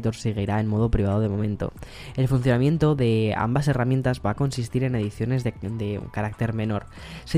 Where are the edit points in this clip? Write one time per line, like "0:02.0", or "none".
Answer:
none